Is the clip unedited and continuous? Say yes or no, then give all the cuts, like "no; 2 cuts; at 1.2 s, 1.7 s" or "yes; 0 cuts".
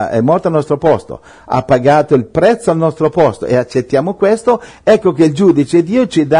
yes; 0 cuts